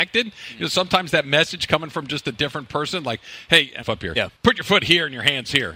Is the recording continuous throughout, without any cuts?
no; 2 cuts; at 3.8 s, 4.4 s

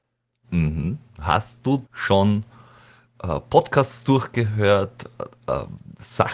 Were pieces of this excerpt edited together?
yes; 1 cut; at 1.9 s

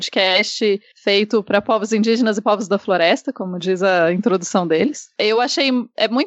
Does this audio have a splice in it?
no; 0 cuts

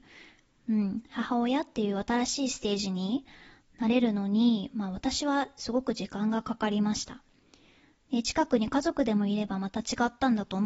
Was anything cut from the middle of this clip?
no; 0 cuts

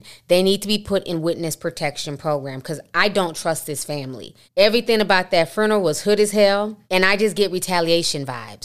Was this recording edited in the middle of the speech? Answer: yes; 2 cuts; at 4.4 s, 6.8 s

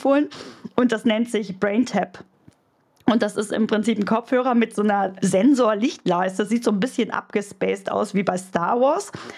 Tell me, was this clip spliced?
yes; 1 cut; at 5.2 s

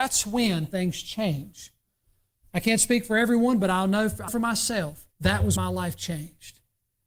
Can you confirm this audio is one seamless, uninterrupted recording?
no; 3 cuts; at 4.3 s, 5.1 s, 5.6 s

